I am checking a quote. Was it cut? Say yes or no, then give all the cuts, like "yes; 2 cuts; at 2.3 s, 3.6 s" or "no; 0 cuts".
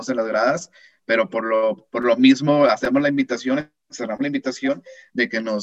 no; 0 cuts